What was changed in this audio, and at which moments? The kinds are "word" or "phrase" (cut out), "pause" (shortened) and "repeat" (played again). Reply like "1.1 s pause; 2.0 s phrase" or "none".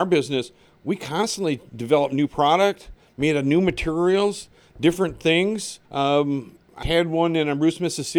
5.9 s pause; 6.8 s word